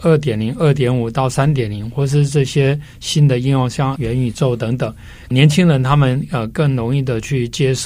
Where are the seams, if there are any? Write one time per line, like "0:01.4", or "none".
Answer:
0:04.0